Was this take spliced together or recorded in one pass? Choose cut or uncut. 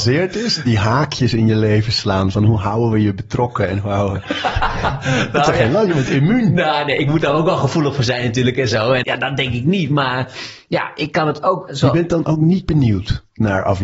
cut